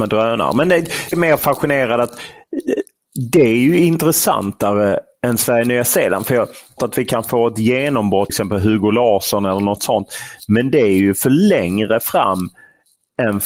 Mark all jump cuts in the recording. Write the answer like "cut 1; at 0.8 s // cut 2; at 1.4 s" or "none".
cut 1; at 1.1 s // cut 2; at 6.8 s // cut 3; at 8.3 s